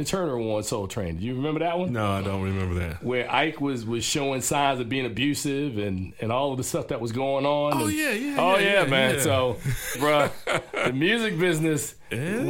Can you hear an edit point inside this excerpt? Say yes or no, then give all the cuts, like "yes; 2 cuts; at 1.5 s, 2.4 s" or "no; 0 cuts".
yes; 1 cut; at 9.9 s